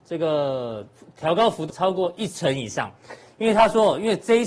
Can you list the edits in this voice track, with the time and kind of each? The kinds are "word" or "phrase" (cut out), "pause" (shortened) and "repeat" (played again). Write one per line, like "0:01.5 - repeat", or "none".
0:01.7 - word